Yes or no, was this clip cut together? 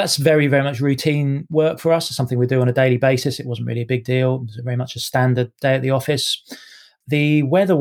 no